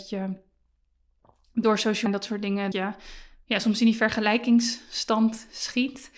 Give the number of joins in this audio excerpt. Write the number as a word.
two